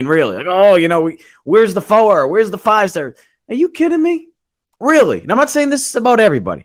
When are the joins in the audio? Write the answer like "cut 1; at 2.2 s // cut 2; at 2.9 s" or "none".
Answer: none